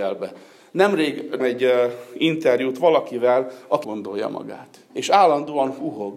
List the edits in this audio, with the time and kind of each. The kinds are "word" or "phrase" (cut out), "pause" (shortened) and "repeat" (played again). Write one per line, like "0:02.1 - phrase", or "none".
0:01.4 - word
0:03.8 - word
0:04.9 - pause